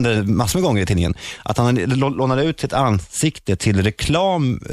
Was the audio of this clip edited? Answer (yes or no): no